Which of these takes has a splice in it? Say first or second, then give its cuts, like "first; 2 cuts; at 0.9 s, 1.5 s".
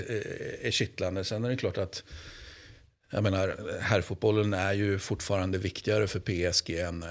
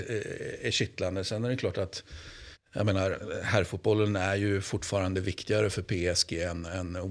second; 1 cut; at 2.5 s